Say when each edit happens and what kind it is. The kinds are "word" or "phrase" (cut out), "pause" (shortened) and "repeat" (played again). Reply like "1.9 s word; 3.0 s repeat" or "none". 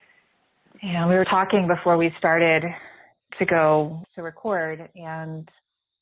1.2 s word; 3.3 s word; 4.0 s word